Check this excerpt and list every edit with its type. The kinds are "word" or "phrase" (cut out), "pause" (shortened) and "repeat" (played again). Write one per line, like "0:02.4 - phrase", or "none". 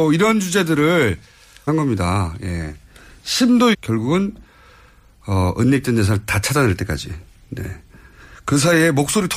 0:01.7 - phrase
0:03.7 - phrase